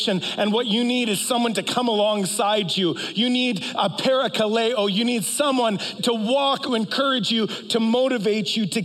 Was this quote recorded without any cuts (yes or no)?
no